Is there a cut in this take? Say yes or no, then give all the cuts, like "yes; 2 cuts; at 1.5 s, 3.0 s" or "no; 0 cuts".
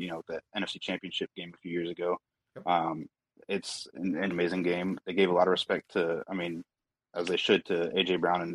yes; 1 cut; at 4.3 s